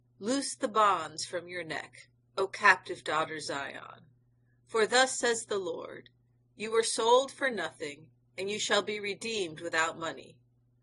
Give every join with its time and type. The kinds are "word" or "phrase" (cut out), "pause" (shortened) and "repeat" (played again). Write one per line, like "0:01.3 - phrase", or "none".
none